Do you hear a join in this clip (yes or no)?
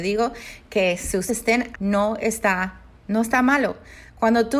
yes